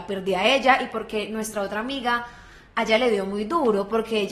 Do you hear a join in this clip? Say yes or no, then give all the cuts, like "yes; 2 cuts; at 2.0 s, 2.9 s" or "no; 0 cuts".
no; 0 cuts